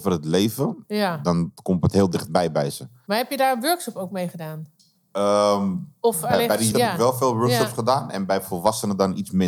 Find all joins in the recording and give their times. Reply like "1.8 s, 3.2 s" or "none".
6.7 s